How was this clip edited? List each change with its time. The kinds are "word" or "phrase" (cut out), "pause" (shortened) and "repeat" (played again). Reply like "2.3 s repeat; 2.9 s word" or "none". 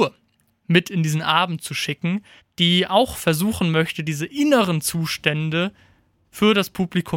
2.4 s pause